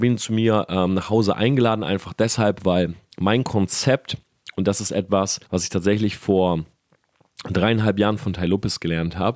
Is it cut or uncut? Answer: cut